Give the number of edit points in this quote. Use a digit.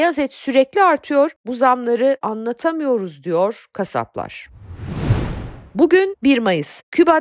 1